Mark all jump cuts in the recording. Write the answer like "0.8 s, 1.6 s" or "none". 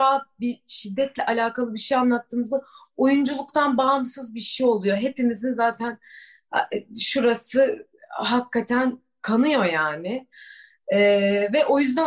none